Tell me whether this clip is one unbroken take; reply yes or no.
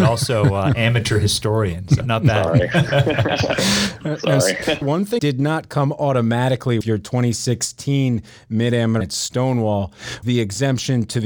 no